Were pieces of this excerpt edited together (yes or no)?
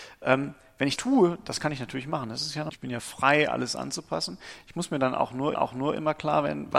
yes